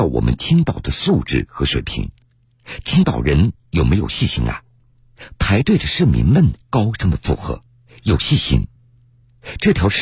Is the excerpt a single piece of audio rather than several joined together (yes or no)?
no